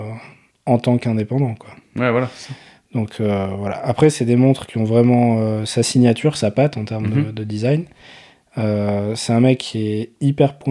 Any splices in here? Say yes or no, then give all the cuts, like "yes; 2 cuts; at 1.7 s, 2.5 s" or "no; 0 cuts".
no; 0 cuts